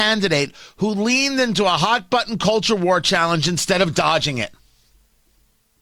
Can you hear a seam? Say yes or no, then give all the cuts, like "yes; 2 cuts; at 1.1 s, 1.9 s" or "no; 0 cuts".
no; 0 cuts